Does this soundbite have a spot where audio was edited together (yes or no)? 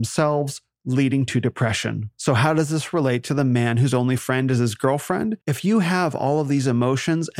yes